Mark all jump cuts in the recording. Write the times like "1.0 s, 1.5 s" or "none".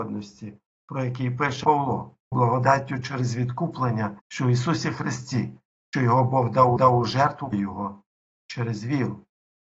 1.6 s, 2.3 s, 4.2 s, 5.9 s, 6.8 s, 7.5 s